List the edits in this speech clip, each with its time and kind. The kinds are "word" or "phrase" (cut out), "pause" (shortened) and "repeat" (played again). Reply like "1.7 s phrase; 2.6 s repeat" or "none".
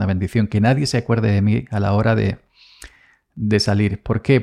none